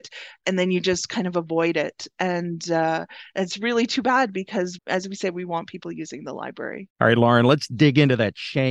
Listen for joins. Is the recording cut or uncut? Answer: cut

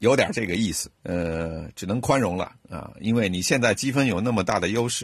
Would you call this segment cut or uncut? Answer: cut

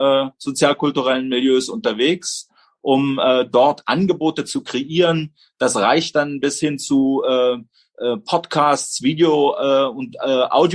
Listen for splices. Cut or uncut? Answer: uncut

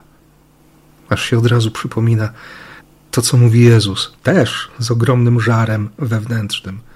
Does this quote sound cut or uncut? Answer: cut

